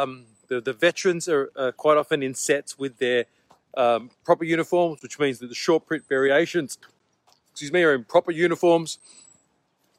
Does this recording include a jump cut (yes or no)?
no